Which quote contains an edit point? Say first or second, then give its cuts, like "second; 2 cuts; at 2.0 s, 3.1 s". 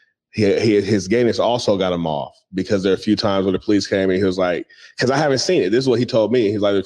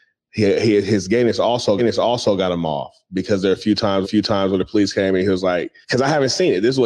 second; 3 cuts; at 1.8 s, 4.0 s, 5.8 s